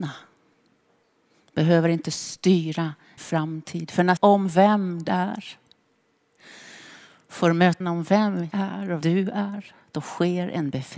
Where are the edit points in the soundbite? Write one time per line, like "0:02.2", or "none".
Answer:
0:03.2
0:04.2
0:05.1
0:07.8
0:08.5
0:09.0